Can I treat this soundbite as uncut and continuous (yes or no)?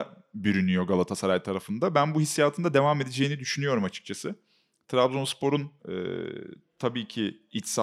no